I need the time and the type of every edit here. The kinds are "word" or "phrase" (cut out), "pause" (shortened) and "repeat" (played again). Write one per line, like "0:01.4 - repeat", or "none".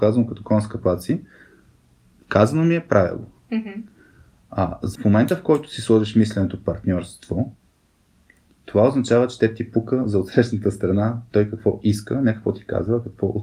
0:04.9 - word